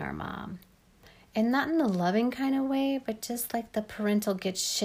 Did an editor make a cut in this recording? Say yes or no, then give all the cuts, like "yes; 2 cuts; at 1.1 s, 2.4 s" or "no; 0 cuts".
no; 0 cuts